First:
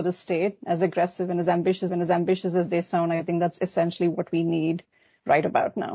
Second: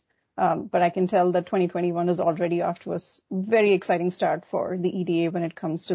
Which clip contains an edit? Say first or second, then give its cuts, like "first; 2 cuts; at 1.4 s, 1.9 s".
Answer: first; 1 cut; at 1.9 s